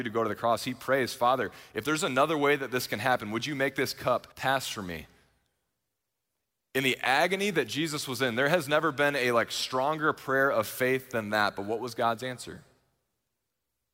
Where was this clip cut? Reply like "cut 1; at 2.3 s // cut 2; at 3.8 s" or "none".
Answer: cut 1; at 4.3 s